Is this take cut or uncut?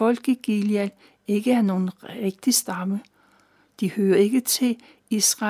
uncut